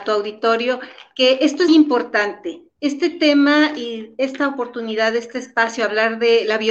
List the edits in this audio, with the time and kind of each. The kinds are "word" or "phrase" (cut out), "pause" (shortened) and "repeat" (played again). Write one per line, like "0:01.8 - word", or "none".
0:01.7 - word